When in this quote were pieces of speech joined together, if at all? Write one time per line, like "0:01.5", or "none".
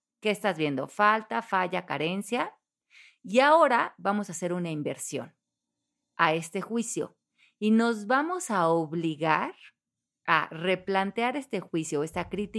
none

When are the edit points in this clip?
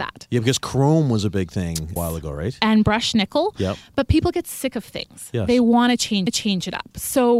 0:02.0
0:06.3

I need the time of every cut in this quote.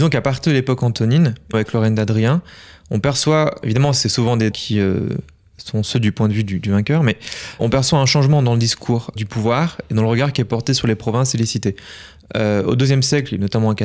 0:01.5
0:03.6
0:04.5
0:07.6
0:09.2

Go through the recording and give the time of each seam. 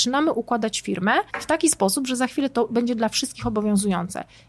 0:01.3

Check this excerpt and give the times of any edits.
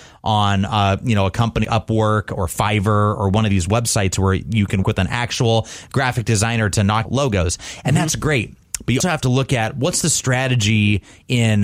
0:01.6
0:04.8
0:07.1
0:09.0

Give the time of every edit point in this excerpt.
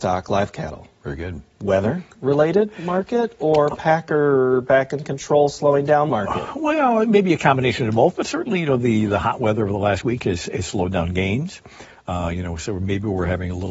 0:02.1
0:06.1

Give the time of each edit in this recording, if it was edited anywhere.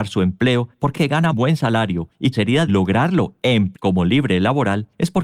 0:00.9
0:01.3
0:02.3
0:02.7
0:03.7

